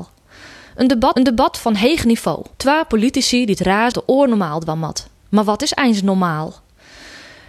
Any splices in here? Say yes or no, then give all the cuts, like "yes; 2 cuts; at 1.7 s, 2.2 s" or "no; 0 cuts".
yes; 4 cuts; at 1.2 s, 2.5 s, 3.9 s, 5.2 s